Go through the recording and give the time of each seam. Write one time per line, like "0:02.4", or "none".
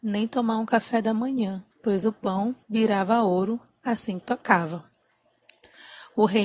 0:01.7
0:02.6
0:04.2

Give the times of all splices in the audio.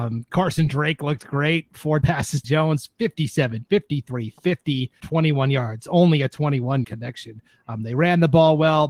0:02.0
0:02.4
0:05.0
0:06.8

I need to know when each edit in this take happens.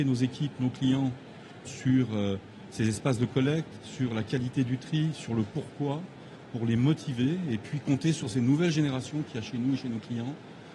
0:01.7

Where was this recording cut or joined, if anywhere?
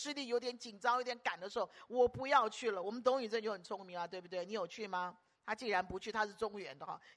none

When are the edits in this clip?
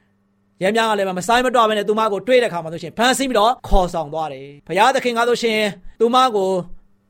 0:03.6
0:04.6
0:06.0

